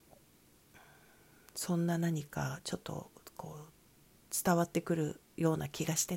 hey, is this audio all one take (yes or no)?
no